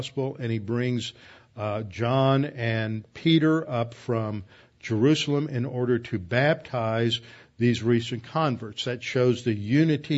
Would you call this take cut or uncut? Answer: uncut